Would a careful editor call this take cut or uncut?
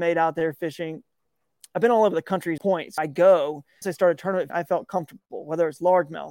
cut